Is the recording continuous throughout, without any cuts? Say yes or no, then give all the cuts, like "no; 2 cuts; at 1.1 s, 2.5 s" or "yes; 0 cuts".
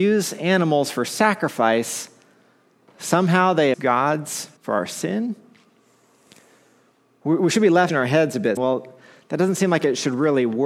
no; 4 cuts; at 3.7 s, 4.6 s, 7.9 s, 8.6 s